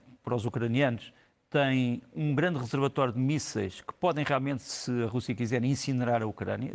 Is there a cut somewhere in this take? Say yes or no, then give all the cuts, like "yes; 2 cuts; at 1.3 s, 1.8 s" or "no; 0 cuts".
no; 0 cuts